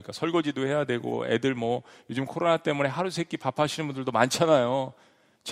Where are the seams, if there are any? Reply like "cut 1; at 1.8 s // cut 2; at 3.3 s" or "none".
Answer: none